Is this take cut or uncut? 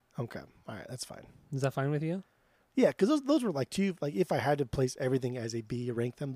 uncut